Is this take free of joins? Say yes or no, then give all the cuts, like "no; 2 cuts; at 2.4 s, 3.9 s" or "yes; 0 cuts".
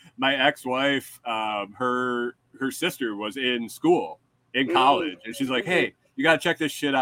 yes; 0 cuts